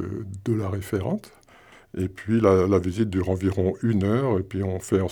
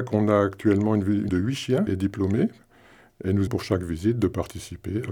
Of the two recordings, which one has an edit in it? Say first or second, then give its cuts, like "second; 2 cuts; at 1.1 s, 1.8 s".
second; 3 cuts; at 1.3 s, 1.9 s, 3.5 s